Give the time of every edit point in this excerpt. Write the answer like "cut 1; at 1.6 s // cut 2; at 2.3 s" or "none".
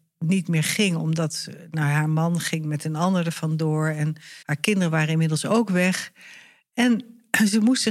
cut 1; at 4.4 s